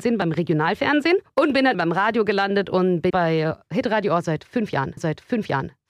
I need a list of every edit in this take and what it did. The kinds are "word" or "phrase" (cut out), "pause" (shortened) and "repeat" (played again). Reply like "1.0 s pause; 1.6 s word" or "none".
1.3 s pause; 1.7 s word; 3.1 s word; 5.0 s repeat